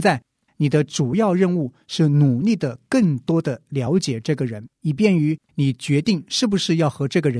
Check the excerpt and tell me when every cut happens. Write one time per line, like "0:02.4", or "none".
0:04.7
0:05.4